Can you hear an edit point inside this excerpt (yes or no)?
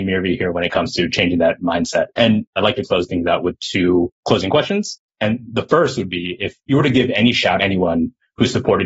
yes